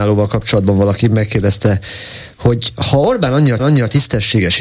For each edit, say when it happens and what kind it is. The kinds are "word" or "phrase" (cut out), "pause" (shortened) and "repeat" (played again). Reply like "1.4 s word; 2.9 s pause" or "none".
3.6 s repeat